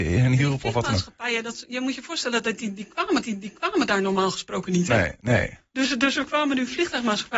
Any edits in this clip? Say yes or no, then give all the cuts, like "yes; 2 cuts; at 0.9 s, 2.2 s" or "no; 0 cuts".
yes; 1 cut; at 3.2 s